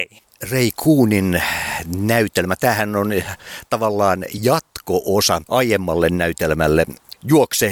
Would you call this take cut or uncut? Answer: uncut